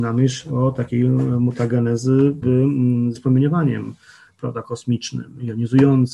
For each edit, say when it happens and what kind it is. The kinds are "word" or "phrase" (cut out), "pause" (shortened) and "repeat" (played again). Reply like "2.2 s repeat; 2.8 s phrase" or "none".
2.4 s word; 3.1 s word